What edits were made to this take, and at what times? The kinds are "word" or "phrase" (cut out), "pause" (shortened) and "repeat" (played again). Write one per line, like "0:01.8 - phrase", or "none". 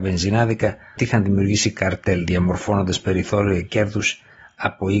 0:01.0 - word